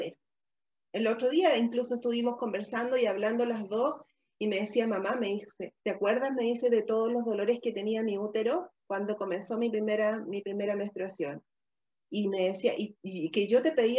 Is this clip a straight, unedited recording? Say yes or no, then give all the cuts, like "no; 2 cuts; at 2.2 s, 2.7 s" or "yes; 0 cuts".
no; 1 cut; at 5.8 s